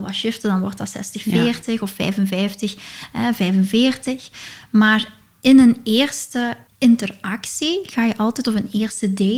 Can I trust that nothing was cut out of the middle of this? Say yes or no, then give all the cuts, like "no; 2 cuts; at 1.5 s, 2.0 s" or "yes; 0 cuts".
yes; 0 cuts